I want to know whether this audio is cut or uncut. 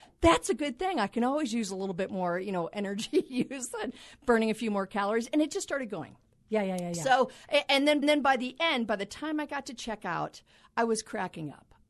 cut